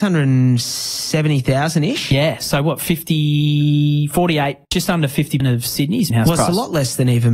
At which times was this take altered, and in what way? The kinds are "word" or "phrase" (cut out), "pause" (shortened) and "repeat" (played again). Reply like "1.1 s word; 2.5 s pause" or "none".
4.6 s pause; 5.4 s word; 6.1 s word